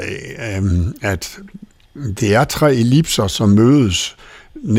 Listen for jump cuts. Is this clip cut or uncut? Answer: uncut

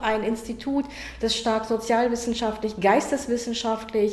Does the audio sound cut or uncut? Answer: uncut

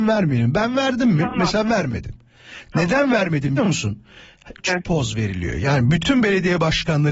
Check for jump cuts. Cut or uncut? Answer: cut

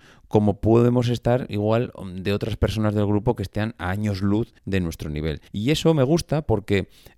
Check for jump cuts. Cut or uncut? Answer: cut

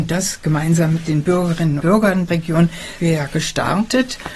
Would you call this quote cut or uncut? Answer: cut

